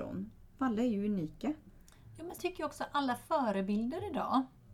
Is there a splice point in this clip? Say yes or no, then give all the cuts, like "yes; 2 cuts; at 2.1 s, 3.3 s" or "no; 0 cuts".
yes; 1 cut; at 2.4 s